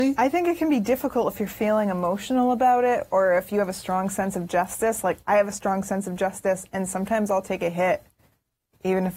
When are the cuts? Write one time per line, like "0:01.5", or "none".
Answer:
none